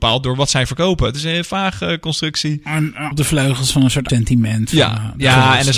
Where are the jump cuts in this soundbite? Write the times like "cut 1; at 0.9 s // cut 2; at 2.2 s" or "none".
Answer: cut 1; at 3.1 s // cut 2; at 4.1 s